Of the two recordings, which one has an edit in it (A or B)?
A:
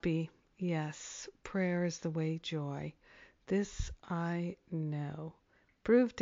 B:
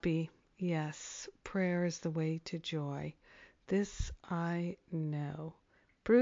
A